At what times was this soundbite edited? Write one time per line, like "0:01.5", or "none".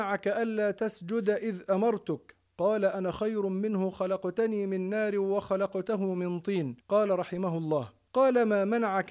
0:06.8